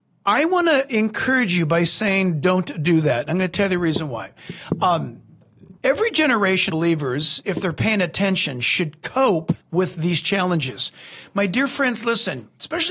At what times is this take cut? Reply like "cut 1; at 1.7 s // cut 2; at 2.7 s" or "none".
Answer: cut 1; at 5.8 s // cut 2; at 6.7 s // cut 3; at 9.6 s